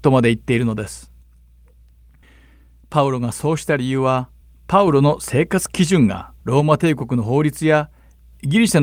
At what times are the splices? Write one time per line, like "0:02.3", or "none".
0:04.4
0:06.4